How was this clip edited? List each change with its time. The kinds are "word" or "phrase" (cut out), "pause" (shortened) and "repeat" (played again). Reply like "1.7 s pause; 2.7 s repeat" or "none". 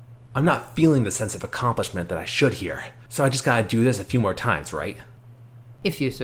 none